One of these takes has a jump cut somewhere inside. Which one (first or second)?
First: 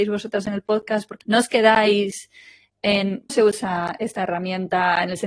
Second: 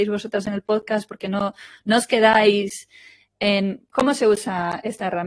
first